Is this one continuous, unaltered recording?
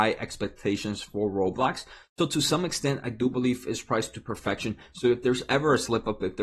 yes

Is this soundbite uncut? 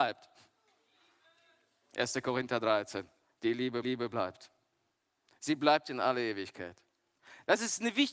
no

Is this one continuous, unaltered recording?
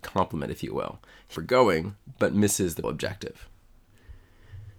no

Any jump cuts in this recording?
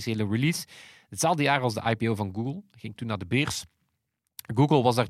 no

